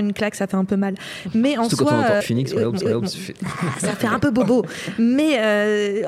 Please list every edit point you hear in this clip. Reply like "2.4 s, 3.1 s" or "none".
2.2 s, 2.8 s